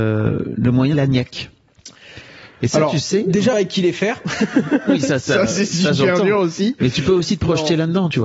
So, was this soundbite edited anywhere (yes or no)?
yes